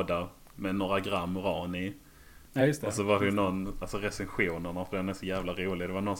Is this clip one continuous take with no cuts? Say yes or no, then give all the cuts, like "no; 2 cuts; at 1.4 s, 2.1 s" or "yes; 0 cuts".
yes; 0 cuts